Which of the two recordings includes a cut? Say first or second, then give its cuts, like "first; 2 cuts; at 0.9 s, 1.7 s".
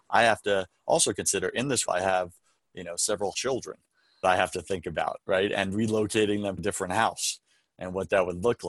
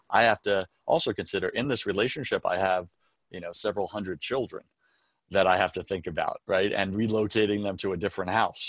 first; 4 cuts; at 1.8 s, 3.3 s, 4.2 s, 6.6 s